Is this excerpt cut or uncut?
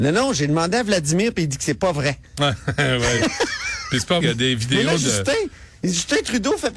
cut